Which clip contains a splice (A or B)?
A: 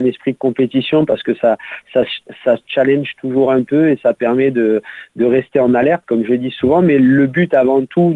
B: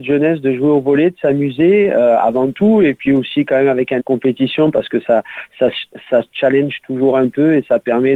B